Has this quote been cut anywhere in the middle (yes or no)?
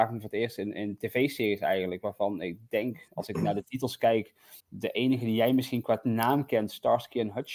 yes